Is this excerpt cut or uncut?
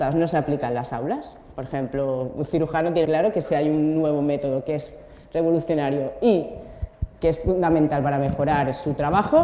cut